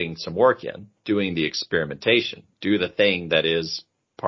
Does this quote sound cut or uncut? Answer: uncut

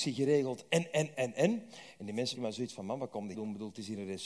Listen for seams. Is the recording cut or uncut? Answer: cut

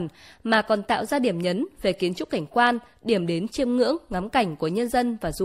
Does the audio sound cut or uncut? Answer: uncut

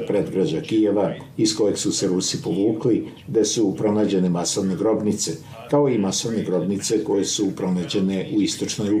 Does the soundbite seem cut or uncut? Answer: uncut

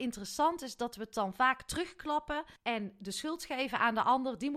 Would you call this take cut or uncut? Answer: cut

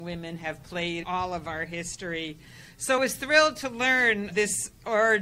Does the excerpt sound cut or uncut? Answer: cut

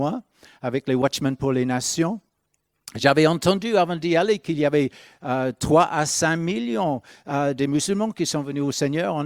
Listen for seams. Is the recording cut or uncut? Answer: uncut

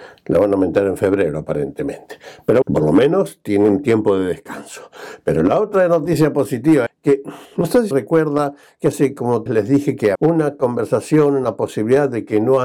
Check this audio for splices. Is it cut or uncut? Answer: cut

